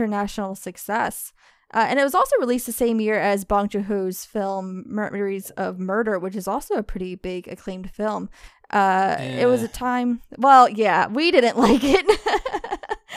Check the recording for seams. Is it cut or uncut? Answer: uncut